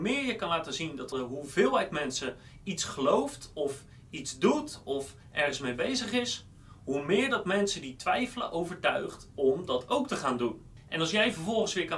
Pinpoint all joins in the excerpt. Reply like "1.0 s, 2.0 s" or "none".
1.1 s